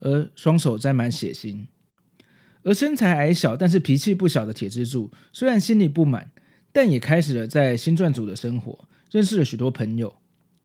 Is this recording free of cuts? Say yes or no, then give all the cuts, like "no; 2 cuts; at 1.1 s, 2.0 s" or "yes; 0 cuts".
yes; 0 cuts